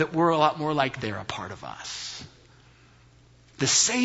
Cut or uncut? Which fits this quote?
cut